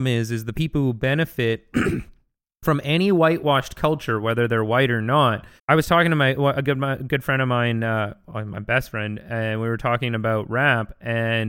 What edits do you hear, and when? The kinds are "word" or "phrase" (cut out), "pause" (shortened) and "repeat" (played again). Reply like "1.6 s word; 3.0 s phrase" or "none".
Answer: 5.6 s word